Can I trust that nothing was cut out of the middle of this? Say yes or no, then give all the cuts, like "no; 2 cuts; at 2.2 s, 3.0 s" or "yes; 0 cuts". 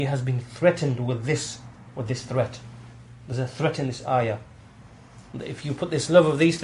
yes; 0 cuts